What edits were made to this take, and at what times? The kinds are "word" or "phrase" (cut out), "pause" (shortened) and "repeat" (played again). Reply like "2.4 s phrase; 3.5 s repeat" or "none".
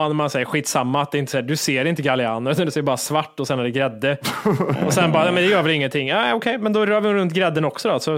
none